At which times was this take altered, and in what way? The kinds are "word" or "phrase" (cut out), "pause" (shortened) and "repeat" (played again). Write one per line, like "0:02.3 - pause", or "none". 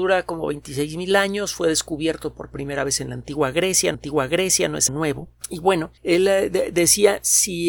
0:03.9 - repeat
0:04.9 - word
0:05.4 - pause
0:06.0 - pause